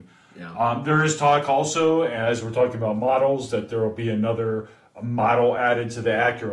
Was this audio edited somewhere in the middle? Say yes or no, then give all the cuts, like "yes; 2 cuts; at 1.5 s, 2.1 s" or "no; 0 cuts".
no; 0 cuts